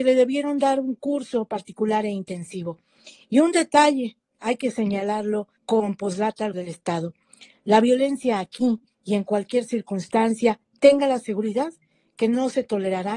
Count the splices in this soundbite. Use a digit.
2